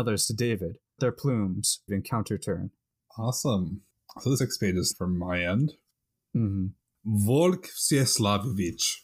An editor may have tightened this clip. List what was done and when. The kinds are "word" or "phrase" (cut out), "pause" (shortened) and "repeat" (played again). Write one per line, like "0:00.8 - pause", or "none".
0:01.0 - word
0:01.9 - word
0:04.4 - word
0:04.9 - word